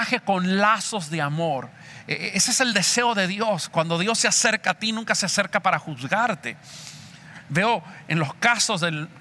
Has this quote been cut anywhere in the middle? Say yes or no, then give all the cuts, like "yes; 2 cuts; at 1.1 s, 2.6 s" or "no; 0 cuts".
no; 0 cuts